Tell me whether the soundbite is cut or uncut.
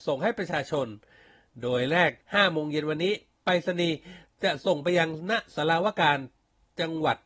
cut